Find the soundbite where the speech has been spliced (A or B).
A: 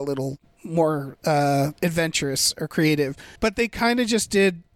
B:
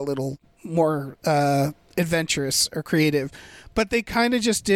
A